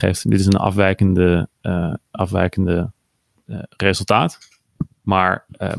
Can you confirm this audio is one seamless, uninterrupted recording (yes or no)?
yes